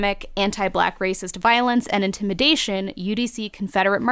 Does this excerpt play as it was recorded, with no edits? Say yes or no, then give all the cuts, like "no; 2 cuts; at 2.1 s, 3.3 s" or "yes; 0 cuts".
yes; 0 cuts